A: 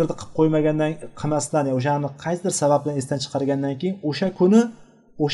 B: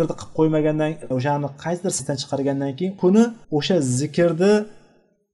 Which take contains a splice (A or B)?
B